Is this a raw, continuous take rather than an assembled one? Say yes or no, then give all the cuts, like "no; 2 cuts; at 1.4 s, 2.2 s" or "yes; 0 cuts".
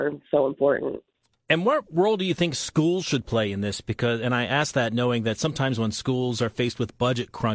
yes; 0 cuts